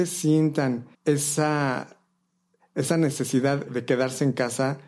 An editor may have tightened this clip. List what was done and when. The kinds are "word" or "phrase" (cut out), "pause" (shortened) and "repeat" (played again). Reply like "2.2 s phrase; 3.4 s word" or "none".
0.9 s pause; 3.7 s word